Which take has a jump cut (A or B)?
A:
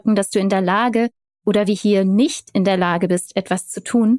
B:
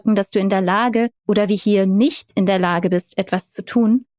B